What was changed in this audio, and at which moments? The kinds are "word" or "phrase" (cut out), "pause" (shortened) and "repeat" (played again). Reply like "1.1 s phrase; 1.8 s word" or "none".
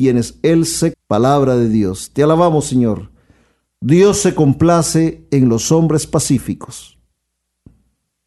0.9 s word